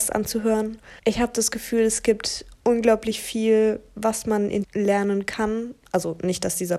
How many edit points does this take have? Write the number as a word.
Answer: two